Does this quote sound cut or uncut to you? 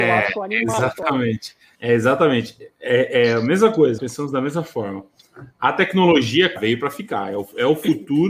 cut